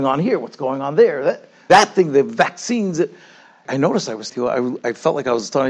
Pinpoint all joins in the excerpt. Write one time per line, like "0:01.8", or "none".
0:01.7
0:03.6
0:04.3